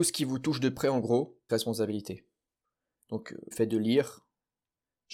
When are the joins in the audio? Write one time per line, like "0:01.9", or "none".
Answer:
0:01.5
0:03.5